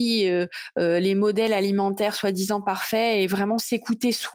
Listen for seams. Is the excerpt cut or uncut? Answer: uncut